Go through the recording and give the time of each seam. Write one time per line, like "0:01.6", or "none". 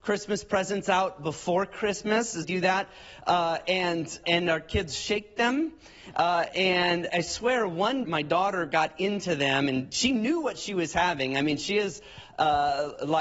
0:02.4
0:04.2
0:07.1
0:08.0